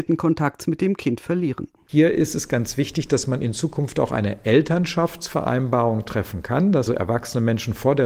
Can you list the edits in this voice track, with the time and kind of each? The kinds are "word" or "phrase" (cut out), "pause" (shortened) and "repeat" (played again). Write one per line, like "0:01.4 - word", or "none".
0:06.9 - word